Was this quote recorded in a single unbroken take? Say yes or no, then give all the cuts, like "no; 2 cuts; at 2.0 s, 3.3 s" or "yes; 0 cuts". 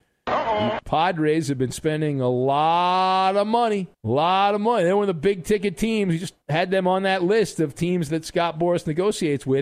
no; 2 cuts; at 3.9 s, 6.4 s